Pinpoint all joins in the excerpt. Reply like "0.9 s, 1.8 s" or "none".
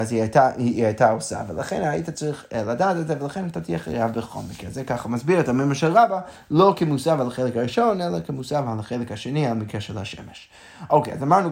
none